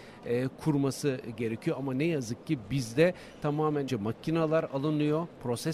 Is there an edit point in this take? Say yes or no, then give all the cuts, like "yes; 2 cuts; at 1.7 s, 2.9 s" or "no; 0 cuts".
yes; 1 cut; at 3.9 s